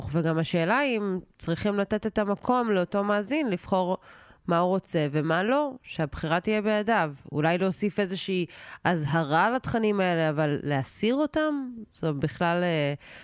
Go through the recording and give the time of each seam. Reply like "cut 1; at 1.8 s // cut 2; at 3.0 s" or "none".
none